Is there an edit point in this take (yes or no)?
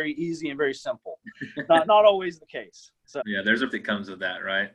yes